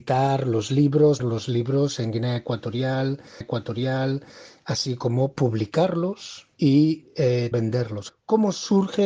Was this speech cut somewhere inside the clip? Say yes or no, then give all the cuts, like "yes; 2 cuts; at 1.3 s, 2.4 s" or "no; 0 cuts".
yes; 5 cuts; at 1.2 s, 3.4 s, 6.5 s, 7.5 s, 8.1 s